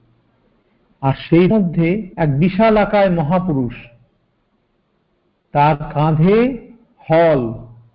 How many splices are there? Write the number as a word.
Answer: two